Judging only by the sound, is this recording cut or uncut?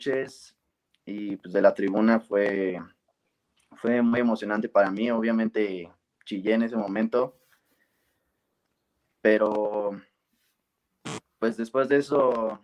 uncut